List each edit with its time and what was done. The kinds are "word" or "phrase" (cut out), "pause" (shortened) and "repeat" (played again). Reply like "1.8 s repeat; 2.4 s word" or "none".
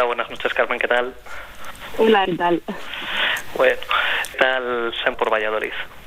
2.2 s word; 4.3 s word; 5.1 s word